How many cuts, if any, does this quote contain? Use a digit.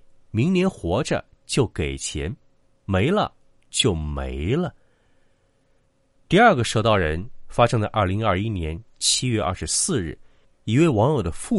0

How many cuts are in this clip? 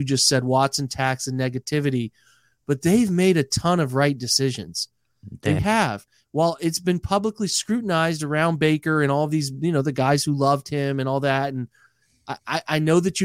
1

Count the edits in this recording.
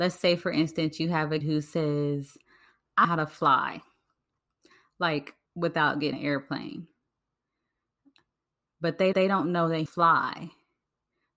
6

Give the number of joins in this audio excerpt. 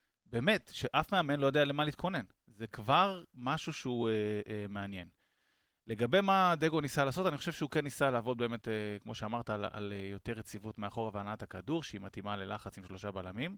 0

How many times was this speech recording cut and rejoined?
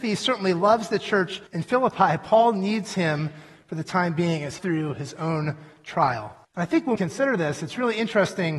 4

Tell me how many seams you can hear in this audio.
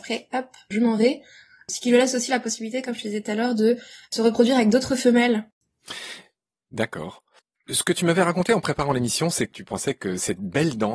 0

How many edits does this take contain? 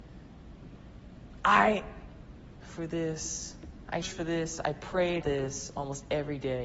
3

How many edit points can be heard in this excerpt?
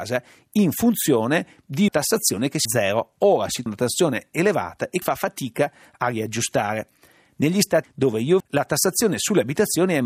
6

